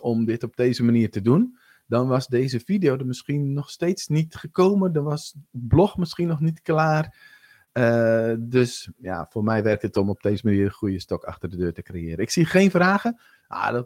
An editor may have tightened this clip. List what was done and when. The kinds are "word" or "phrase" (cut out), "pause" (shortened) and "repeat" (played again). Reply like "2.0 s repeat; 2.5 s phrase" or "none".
none